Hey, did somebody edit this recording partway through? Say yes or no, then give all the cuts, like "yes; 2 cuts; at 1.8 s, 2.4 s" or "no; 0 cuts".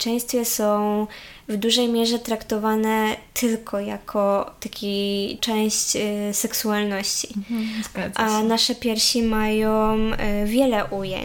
yes; 1 cut; at 5.4 s